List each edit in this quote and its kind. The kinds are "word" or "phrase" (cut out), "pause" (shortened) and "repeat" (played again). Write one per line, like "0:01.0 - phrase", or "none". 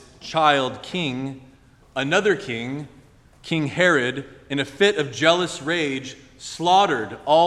none